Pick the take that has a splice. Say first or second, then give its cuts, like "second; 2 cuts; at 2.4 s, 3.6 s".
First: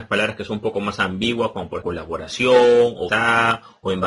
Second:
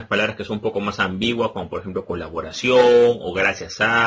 first; 2 cuts; at 1.8 s, 3.1 s